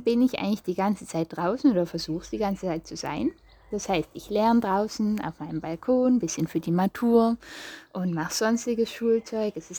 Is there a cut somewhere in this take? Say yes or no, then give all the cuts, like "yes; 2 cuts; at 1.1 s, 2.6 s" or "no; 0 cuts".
no; 0 cuts